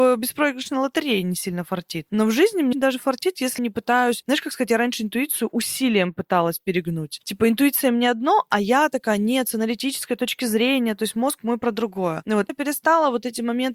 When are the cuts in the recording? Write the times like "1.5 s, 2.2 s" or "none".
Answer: 2.7 s, 3.6 s, 12.5 s